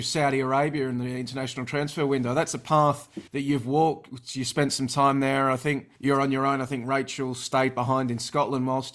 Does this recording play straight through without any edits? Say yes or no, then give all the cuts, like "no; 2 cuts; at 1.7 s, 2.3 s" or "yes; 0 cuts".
no; 2 cuts; at 3.3 s, 6.0 s